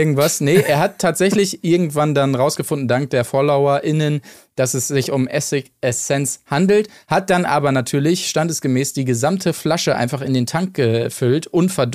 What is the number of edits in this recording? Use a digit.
0